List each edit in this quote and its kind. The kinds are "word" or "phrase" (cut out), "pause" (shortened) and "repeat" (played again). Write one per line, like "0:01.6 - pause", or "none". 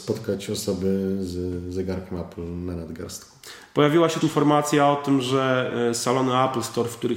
0:04.2 - word